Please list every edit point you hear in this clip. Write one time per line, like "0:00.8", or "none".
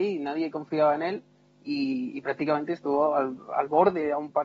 none